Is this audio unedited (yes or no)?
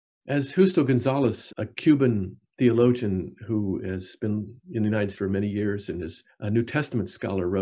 no